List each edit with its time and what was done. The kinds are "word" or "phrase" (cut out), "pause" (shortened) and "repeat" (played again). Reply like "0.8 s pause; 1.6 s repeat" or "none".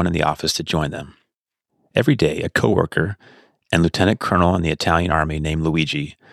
none